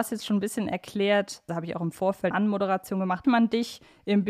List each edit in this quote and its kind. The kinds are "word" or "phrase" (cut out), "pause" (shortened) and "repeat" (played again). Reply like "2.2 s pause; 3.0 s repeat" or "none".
1.5 s word; 2.3 s word; 3.2 s word